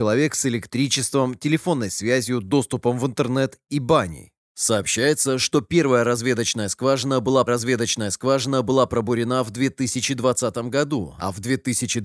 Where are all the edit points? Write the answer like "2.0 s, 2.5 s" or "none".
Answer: 7.5 s